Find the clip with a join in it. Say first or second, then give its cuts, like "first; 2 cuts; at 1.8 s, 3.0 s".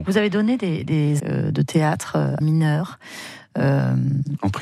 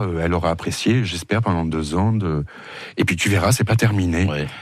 first; 2 cuts; at 1.2 s, 2.4 s